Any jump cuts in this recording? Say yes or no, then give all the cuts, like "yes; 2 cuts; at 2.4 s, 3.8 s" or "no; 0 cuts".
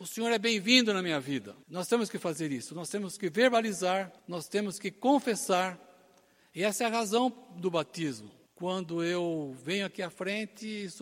yes; 3 cuts; at 1.6 s, 4.2 s, 8.5 s